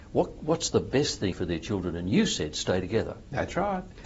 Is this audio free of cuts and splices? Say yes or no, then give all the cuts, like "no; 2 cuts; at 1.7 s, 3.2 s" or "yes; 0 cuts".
no; 1 cut; at 1.3 s